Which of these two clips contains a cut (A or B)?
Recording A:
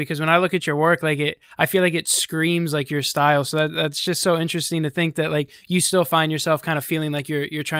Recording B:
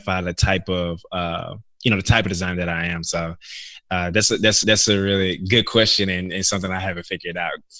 B